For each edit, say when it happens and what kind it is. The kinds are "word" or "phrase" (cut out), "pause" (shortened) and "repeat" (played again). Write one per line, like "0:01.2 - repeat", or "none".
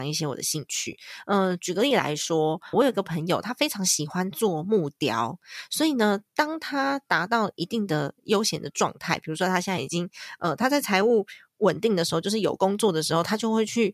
0:02.7 - word